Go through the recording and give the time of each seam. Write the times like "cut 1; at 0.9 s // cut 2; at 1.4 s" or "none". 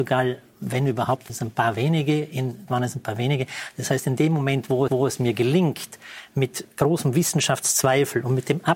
cut 1; at 1.3 s // cut 2; at 2.7 s // cut 3; at 4.9 s // cut 4; at 6.7 s